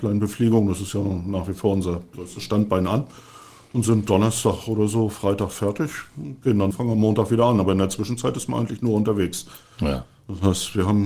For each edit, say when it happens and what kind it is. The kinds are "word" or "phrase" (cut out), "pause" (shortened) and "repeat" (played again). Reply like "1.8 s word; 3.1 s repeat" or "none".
6.7 s phrase